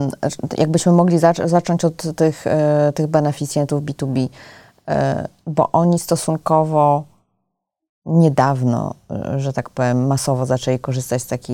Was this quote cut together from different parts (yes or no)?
no